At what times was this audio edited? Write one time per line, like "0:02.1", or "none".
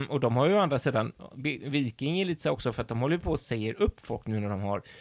none